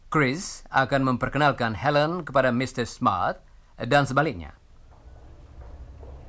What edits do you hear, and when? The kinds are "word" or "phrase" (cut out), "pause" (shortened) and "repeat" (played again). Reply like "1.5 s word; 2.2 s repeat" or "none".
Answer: none